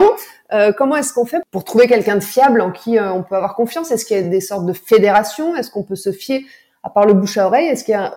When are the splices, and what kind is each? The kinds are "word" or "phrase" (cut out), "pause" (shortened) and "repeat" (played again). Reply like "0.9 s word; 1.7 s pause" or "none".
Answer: none